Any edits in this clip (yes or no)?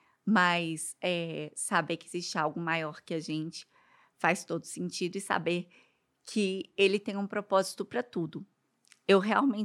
no